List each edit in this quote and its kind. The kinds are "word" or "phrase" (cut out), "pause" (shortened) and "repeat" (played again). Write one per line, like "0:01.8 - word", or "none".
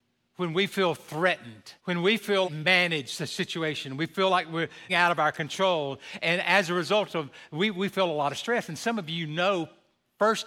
0:01.8 - pause
0:02.4 - phrase
0:04.9 - phrase